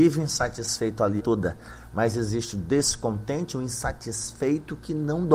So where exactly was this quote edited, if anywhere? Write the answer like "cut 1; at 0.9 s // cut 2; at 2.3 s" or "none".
cut 1; at 1.2 s